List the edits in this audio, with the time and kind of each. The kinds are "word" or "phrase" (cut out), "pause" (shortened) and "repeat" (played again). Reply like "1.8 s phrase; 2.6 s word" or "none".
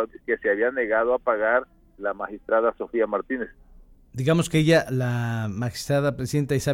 2.0 s word; 4.8 s word